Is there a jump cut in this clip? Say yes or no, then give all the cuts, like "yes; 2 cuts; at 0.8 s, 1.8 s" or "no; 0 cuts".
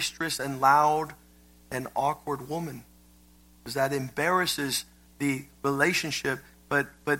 no; 0 cuts